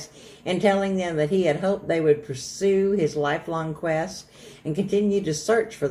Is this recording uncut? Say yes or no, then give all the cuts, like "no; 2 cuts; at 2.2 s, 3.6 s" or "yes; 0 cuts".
yes; 0 cuts